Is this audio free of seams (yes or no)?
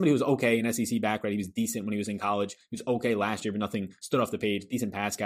yes